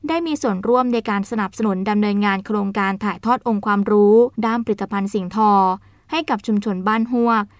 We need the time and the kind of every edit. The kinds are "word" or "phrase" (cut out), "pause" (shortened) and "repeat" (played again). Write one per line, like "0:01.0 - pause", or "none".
0:04.3 - pause

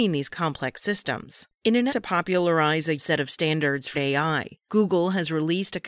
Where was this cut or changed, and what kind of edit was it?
0:01.9 - word
0:03.0 - word
0:03.9 - word

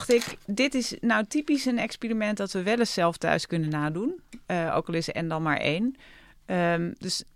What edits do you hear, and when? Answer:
none

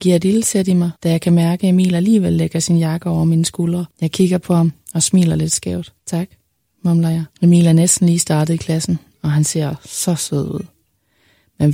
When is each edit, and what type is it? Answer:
0:01.0 - pause
0:03.9 - pause
0:06.0 - pause
0:07.3 - pause

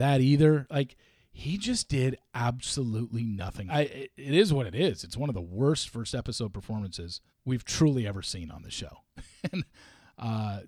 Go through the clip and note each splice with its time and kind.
0:03.7 - phrase
0:07.3 - pause

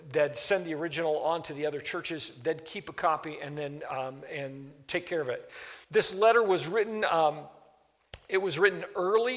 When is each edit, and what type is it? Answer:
0:05.8 - pause

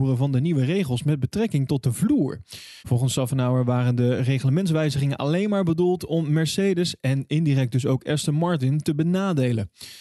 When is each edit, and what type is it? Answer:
0:02.8 - pause

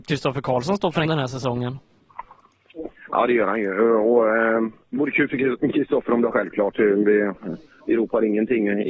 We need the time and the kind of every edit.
0:01.0 - word
0:04.9 - word
0:06.3 - word

